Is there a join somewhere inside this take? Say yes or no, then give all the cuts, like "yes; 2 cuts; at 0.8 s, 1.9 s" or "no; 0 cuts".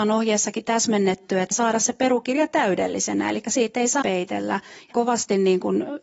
yes; 3 cuts; at 1.5 s, 4.0 s, 4.9 s